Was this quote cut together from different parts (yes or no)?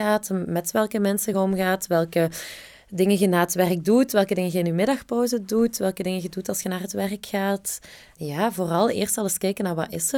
no